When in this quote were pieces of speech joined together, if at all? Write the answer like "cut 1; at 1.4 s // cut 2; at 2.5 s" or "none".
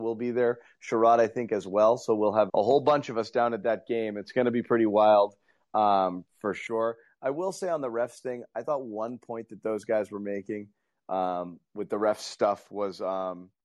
cut 1; at 2.5 s